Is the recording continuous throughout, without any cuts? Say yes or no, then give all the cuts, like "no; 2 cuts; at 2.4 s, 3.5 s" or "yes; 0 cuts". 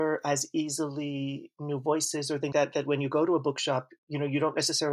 no; 1 cut; at 2.5 s